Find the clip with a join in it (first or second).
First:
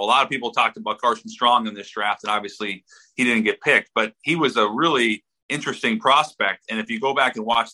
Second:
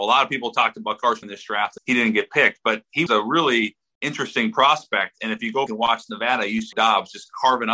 second